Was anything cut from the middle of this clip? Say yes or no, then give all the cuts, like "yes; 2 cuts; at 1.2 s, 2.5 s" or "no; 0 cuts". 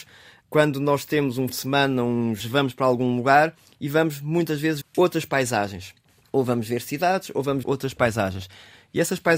yes; 4 cuts; at 1.5 s, 2.4 s, 4.8 s, 7.6 s